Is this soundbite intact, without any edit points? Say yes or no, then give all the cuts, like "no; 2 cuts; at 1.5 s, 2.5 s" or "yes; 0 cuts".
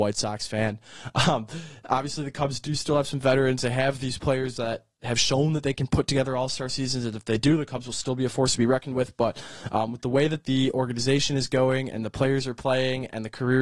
yes; 0 cuts